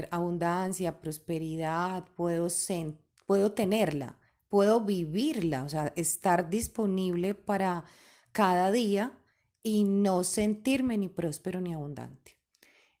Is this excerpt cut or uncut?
uncut